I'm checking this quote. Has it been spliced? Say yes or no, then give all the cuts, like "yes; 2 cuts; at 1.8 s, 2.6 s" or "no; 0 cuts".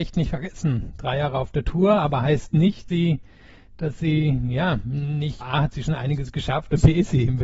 yes; 2 cuts; at 2.9 s, 5.4 s